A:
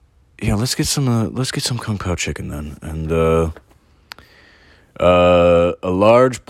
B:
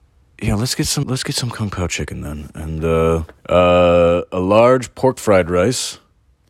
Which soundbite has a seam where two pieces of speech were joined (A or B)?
B